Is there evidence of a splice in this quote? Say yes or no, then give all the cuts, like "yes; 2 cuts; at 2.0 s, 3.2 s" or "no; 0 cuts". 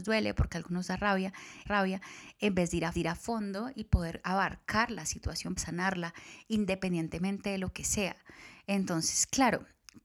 yes; 3 cuts; at 1.7 s, 2.9 s, 5.6 s